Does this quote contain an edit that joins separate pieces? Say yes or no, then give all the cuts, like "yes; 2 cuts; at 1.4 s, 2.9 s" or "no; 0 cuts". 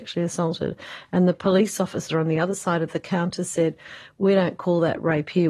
no; 0 cuts